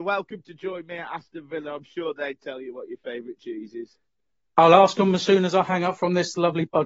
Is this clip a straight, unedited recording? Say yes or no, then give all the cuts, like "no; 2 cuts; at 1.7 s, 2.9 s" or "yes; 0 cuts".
yes; 0 cuts